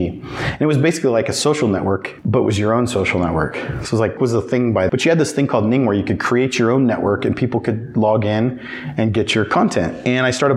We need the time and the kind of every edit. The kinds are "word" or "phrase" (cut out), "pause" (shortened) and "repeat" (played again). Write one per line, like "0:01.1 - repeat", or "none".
0:04.2 - word
0:04.9 - word